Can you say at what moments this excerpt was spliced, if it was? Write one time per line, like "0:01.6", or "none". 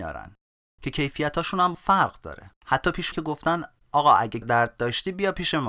0:01.7
0:02.6
0:03.1
0:04.4